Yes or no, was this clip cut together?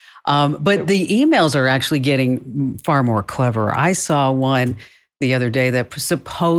no